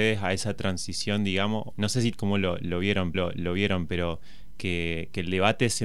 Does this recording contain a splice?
yes; 3 cuts; at 1.7 s, 2.1 s, 3.1 s

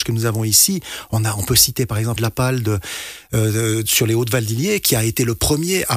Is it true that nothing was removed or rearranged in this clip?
no; 1 cut; at 2.2 s

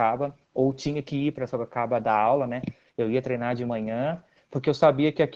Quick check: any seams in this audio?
no; 0 cuts

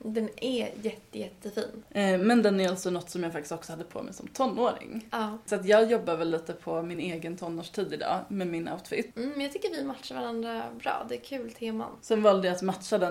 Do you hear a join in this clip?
no; 0 cuts

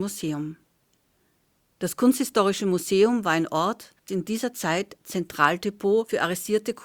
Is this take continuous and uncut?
no; 1 cut; at 4.1 s

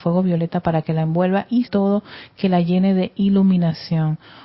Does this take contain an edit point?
yes; 1 cut; at 1.6 s

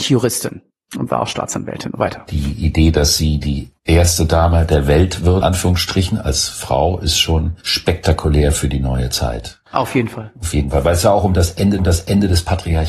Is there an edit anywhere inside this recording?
yes; 6 cuts; at 2.0 s, 3.8 s, 5.4 s, 7.6 s, 9.7 s, 11.8 s

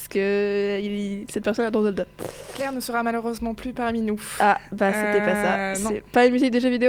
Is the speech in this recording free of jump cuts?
yes; 0 cuts

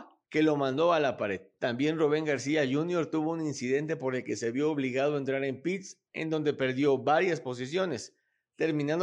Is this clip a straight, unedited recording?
yes; 0 cuts

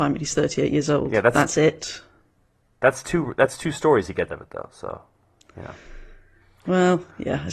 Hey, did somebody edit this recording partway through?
yes; 1 cut; at 4.3 s

